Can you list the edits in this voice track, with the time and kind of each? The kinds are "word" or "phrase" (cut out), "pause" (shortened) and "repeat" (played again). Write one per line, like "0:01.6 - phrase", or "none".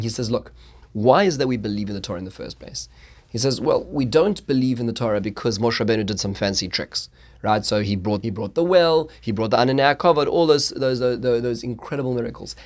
0:08.2 - phrase